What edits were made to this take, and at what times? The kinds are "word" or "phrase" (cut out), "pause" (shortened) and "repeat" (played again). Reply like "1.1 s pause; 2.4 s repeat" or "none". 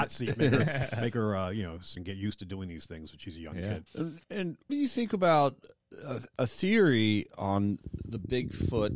2.0 s phrase; 3.9 s pause; 4.7 s word